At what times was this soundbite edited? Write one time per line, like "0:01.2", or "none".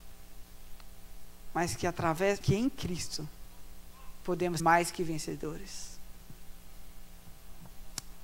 0:02.4
0:04.6